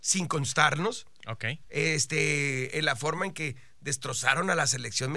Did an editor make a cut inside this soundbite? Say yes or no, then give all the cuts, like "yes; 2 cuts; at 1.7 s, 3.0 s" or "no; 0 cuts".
no; 0 cuts